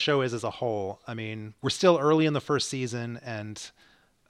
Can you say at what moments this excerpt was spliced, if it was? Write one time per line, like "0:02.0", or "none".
0:01.6